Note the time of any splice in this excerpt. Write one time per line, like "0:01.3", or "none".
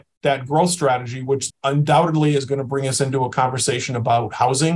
0:01.5